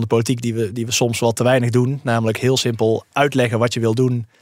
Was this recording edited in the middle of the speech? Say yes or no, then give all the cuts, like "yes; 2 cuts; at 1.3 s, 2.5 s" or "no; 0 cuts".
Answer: no; 0 cuts